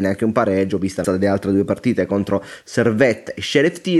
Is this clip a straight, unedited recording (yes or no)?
no